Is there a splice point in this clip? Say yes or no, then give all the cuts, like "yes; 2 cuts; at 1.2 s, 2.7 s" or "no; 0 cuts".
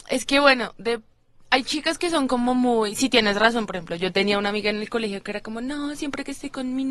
no; 0 cuts